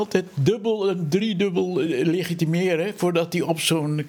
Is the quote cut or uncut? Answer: uncut